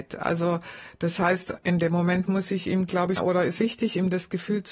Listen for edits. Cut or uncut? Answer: cut